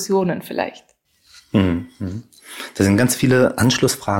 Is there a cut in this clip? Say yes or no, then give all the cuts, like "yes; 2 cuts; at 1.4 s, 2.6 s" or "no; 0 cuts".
no; 0 cuts